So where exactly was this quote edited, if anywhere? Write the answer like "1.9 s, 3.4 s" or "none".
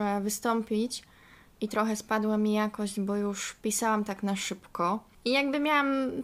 none